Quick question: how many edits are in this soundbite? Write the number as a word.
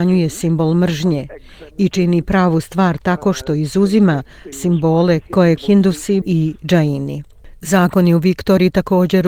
three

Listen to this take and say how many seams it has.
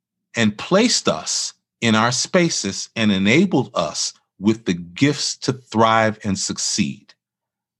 zero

